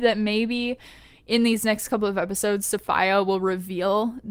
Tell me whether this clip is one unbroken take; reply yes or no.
yes